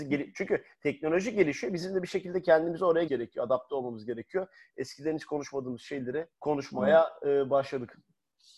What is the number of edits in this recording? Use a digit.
2